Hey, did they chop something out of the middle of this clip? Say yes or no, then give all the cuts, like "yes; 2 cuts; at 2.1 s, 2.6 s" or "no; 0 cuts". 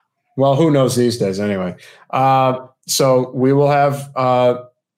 no; 0 cuts